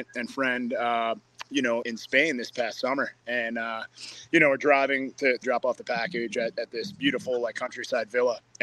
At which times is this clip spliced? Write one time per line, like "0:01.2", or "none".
0:01.8
0:05.4